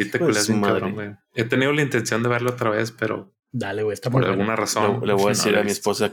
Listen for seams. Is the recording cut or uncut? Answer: cut